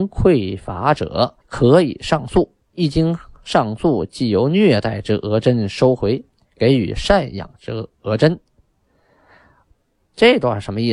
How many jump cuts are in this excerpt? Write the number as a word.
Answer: one